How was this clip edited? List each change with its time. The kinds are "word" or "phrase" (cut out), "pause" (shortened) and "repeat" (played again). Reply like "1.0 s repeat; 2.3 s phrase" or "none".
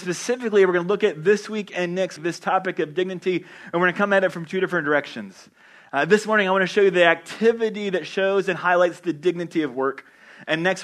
2.2 s word